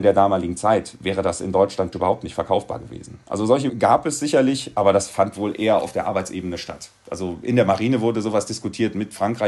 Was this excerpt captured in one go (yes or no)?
no